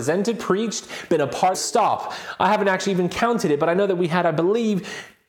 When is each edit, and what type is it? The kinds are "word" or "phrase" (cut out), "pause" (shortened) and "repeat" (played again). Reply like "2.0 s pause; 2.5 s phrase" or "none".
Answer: 1.5 s phrase